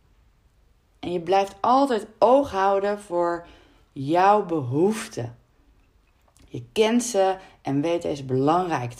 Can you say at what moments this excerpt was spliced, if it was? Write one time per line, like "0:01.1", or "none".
none